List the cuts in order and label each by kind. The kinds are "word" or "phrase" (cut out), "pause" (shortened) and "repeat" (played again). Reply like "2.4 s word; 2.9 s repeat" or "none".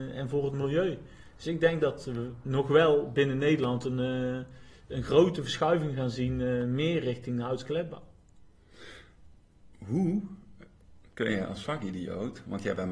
none